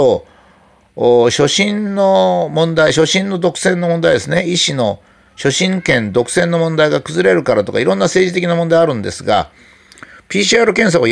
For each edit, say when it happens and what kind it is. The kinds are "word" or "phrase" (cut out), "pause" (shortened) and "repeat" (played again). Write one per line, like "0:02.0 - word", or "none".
none